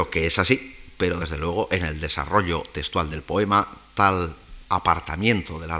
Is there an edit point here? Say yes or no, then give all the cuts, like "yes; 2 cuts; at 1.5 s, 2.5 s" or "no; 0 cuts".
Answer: no; 0 cuts